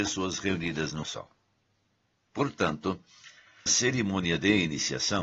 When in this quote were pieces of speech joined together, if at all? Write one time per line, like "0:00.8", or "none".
0:01.0
0:03.7